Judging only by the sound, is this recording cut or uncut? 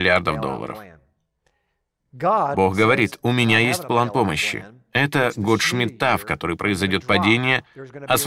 uncut